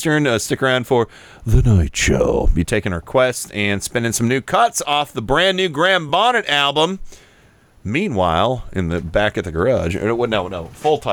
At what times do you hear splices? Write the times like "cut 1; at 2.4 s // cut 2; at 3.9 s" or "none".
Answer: none